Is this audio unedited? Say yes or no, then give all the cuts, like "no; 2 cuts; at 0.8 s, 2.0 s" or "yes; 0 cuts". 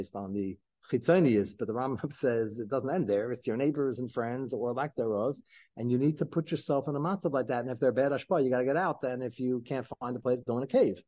yes; 0 cuts